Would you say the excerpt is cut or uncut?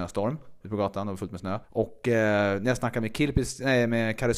cut